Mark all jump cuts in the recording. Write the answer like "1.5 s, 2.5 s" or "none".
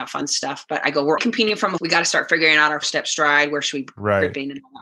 1.2 s, 1.8 s, 2.8 s